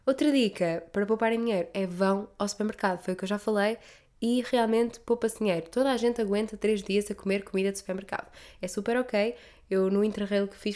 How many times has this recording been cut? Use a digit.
0